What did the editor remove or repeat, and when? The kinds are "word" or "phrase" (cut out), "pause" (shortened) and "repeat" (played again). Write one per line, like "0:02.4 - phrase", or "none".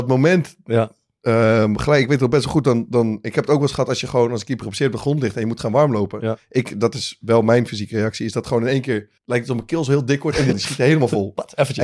0:09.2 - pause
0:10.5 - word